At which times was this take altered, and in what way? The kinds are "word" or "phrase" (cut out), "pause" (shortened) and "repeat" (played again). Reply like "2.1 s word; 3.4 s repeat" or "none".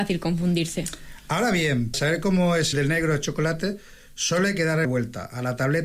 1.9 s word; 2.7 s word; 4.8 s word